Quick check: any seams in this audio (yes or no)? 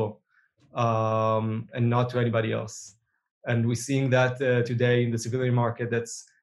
no